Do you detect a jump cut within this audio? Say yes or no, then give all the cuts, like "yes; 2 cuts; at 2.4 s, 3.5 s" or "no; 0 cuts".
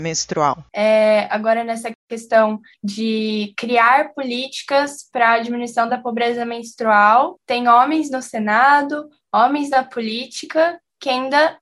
no; 0 cuts